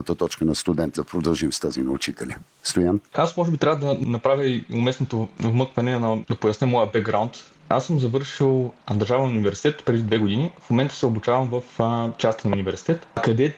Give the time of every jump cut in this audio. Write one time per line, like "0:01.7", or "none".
0:01.0